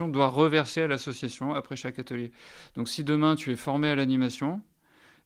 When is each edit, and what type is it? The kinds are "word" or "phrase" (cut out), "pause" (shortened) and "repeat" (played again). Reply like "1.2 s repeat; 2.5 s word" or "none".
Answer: none